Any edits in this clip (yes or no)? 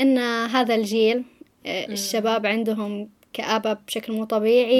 no